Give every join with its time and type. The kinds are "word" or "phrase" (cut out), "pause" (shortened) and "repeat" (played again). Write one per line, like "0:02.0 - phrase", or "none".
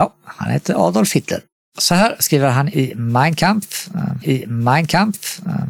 0:04.2 - repeat